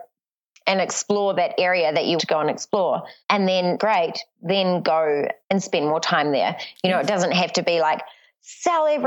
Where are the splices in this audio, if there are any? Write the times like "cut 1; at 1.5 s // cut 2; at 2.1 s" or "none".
cut 1; at 2.2 s // cut 2; at 3.2 s // cut 3; at 3.8 s // cut 4; at 5.4 s